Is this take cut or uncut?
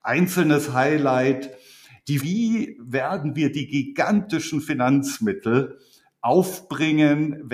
cut